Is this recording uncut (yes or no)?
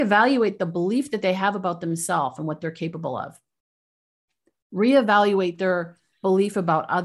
yes